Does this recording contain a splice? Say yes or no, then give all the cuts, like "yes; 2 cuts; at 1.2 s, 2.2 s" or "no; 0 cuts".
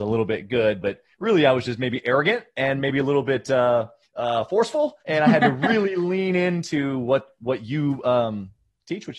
yes; 2 cuts; at 4.0 s, 5.0 s